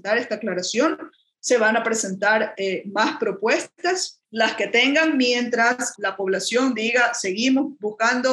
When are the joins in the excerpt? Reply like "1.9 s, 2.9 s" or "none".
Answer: 4.2 s, 6.0 s